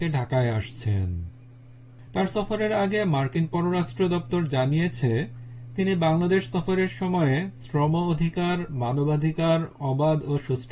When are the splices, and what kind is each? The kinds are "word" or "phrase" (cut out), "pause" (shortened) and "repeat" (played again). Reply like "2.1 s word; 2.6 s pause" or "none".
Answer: none